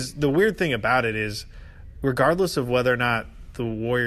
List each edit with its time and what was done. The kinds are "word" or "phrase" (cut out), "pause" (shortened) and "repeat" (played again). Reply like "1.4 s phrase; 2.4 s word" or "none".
none